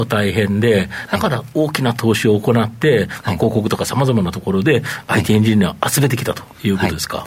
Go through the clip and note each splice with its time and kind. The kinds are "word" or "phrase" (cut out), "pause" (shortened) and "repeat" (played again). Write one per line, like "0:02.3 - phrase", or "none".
none